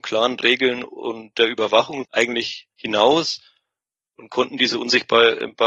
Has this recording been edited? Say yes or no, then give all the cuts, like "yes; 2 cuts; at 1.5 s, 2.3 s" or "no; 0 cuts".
yes; 2 cuts; at 2.0 s, 2.7 s